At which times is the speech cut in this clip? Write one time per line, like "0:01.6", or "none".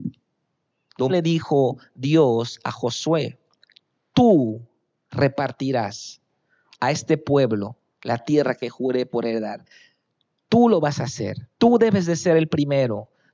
0:01.1
0:11.5